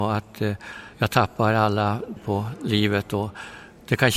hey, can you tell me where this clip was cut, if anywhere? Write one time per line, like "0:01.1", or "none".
0:00.9
0:02.2